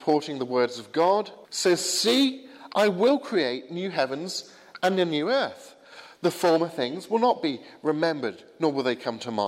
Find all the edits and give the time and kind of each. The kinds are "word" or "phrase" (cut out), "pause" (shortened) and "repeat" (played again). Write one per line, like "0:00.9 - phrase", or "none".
0:01.4 - pause

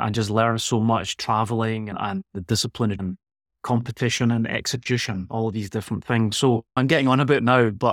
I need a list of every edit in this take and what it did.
0:03.0 - word
0:06.7 - pause

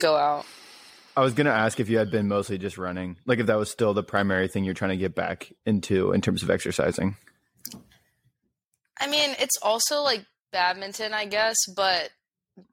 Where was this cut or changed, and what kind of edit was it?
none

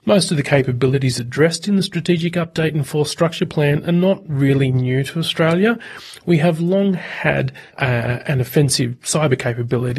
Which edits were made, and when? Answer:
0:07.7 - pause

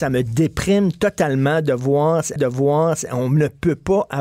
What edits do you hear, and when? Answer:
0:02.4 - repeat

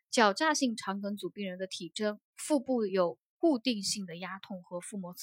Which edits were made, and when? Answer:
0:02.3 - pause

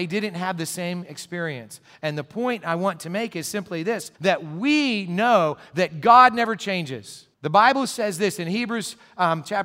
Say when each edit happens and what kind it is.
0:04.2 - pause
0:07.3 - pause

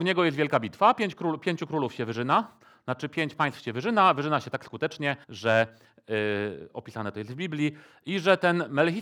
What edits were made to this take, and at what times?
0:05.2 - pause

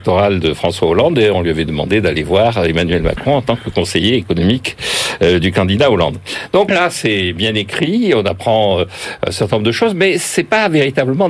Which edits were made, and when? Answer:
0:06.7 - word

